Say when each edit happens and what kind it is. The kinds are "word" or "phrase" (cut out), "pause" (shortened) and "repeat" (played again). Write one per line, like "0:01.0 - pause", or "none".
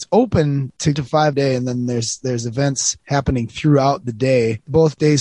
0:00.9 - phrase
0:01.3 - word